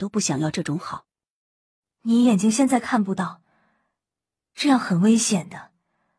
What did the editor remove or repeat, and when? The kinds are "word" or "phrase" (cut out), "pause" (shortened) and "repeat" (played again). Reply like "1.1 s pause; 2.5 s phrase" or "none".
none